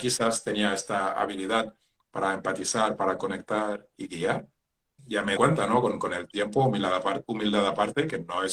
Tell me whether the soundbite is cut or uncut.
cut